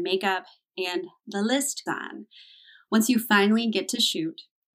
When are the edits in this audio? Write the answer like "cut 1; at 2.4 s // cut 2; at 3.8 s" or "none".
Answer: cut 1; at 1.9 s